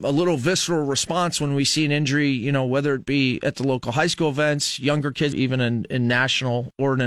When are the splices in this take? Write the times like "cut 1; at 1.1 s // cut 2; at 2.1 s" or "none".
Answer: cut 1; at 5.3 s